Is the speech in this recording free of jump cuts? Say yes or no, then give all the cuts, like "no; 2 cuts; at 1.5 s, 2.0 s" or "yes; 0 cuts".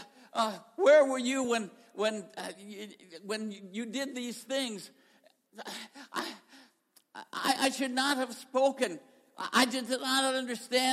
yes; 0 cuts